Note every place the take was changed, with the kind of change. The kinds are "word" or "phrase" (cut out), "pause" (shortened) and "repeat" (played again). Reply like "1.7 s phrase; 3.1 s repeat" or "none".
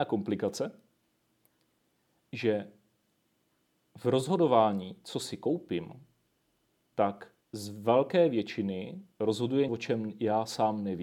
7.4 s pause; 9.7 s word